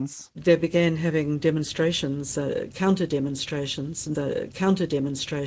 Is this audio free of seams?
no; 1 cut; at 4.1 s

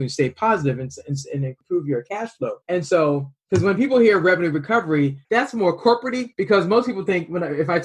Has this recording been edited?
yes; 3 cuts; at 2.6 s, 5.2 s, 6.3 s

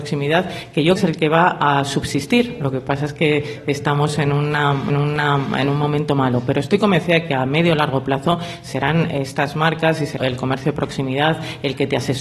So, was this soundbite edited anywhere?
yes; 3 cuts; at 1.0 s, 4.9 s, 10.2 s

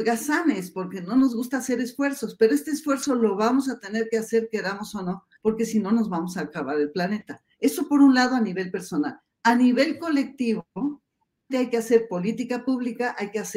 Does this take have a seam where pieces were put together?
yes; 3 cuts; at 5.4 s, 7.5 s, 11.5 s

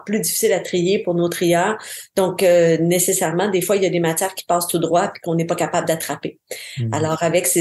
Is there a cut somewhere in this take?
no; 0 cuts

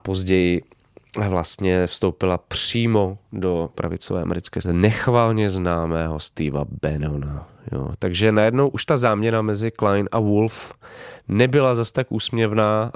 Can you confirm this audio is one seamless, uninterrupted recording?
no; 2 cuts; at 3.7 s, 4.6 s

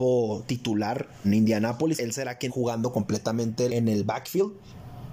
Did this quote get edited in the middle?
yes; 4 cuts; at 1.2 s, 2.0 s, 2.5 s, 3.7 s

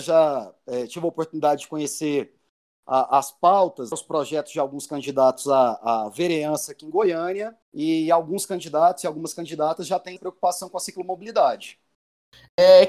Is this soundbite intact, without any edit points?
no; 3 cuts; at 3.9 s, 7.6 s, 10.2 s

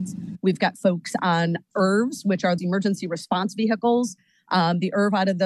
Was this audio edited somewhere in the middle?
yes; 1 cut; at 2.6 s

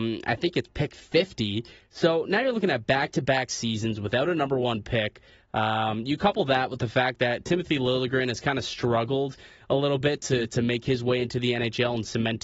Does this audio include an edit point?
no; 0 cuts

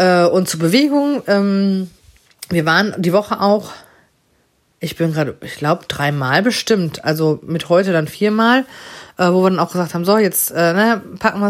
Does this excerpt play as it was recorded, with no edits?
yes; 0 cuts

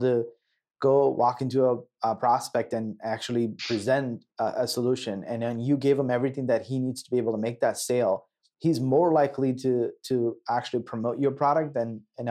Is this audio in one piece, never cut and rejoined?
yes; 0 cuts

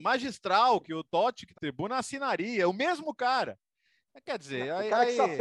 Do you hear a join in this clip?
yes; 1 cut; at 1.5 s

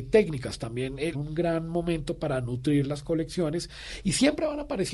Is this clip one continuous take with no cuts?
no; 1 cut; at 1.1 s

